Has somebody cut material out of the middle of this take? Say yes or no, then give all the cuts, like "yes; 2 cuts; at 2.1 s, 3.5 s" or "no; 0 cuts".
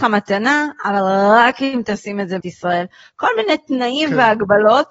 yes; 1 cut; at 2.4 s